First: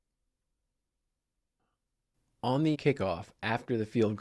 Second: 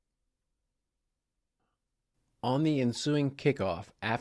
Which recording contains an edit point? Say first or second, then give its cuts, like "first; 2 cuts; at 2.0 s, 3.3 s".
first; 1 cut; at 2.7 s